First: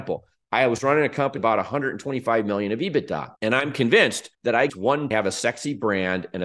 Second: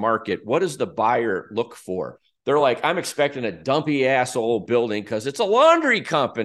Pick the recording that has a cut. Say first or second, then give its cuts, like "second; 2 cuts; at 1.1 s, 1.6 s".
first; 5 cuts; at 1.4 s, 3.4 s, 4.3 s, 4.7 s, 5.1 s